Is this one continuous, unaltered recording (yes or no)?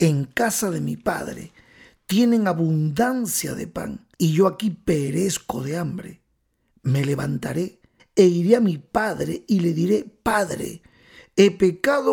no